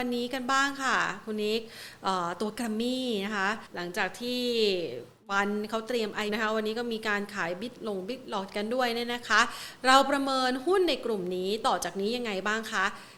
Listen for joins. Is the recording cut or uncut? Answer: cut